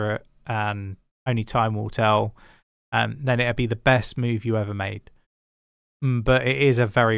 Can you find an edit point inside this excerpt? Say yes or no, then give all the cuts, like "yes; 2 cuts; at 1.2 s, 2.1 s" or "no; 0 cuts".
no; 0 cuts